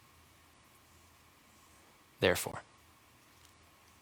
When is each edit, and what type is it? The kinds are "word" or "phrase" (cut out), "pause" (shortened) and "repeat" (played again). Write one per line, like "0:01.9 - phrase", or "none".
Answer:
none